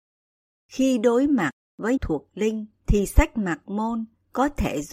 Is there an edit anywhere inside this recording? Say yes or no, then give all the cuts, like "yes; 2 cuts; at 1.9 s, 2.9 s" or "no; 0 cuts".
yes; 2 cuts; at 2.0 s, 2.8 s